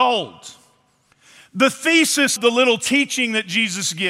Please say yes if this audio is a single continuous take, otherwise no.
no